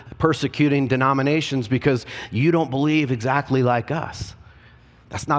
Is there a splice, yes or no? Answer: no